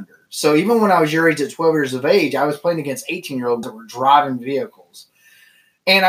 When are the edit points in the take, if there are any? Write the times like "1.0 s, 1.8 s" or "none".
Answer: 3.6 s